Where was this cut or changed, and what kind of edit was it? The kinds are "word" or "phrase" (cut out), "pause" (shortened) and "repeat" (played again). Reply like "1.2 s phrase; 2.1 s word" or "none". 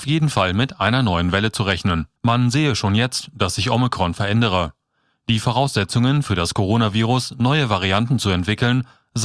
2.2 s pause